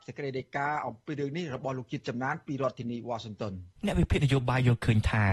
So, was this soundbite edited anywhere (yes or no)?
yes